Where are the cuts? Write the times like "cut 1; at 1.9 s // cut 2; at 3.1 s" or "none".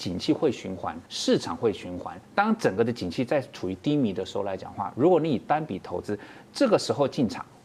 cut 1; at 1.1 s // cut 2; at 2.2 s